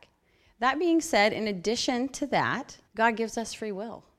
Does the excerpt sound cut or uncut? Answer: cut